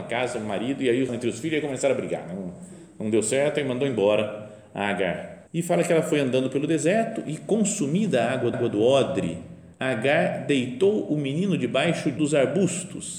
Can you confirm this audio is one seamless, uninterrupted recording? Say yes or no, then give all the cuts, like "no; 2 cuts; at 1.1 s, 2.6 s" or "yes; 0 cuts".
no; 5 cuts; at 1.1 s, 5.5 s, 8.5 s, 9.7 s, 12.2 s